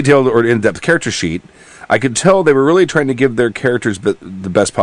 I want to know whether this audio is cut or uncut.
uncut